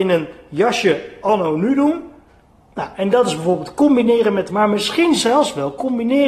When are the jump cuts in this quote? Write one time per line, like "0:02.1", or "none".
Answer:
0:04.5